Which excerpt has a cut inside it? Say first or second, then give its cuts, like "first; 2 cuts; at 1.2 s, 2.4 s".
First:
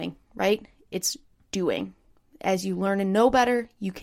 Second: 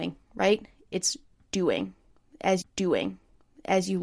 second; 1 cut; at 2.6 s